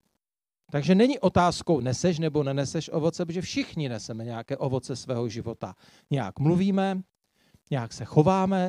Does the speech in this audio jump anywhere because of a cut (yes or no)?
no